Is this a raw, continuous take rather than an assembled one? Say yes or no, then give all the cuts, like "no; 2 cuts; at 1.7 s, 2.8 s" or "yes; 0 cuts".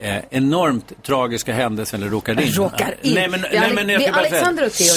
yes; 0 cuts